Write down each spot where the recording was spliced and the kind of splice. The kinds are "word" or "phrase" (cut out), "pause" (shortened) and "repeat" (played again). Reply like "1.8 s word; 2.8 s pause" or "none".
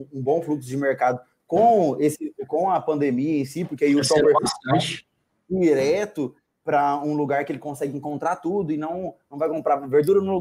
none